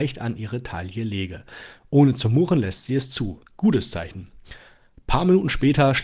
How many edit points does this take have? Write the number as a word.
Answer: one